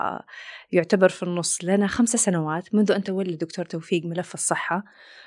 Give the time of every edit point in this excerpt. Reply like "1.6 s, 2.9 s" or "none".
none